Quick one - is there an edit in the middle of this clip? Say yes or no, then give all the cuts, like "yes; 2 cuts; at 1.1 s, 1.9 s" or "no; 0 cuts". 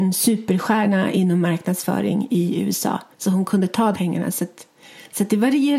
yes; 2 cuts; at 3.1 s, 3.9 s